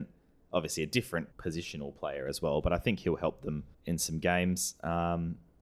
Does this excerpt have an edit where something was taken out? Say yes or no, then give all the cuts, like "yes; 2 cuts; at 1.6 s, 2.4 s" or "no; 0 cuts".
yes; 2 cuts; at 1.3 s, 3.7 s